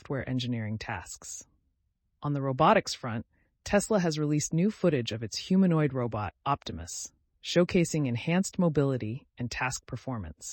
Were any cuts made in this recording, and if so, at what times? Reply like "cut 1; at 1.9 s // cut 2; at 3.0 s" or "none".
none